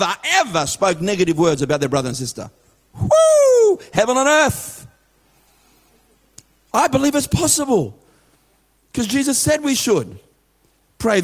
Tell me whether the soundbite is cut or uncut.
uncut